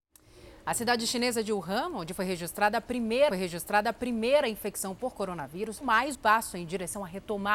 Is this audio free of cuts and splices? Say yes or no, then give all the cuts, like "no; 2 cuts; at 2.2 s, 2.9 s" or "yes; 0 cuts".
no; 3 cuts; at 3.3 s, 5.8 s, 6.1 s